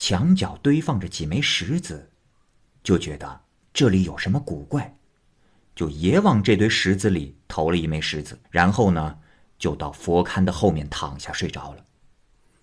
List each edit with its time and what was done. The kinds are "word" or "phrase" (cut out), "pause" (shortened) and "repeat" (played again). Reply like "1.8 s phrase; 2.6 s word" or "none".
8.4 s pause